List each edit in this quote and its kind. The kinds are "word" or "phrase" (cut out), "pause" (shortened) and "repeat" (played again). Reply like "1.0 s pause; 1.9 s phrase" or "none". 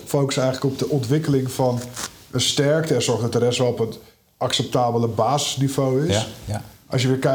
none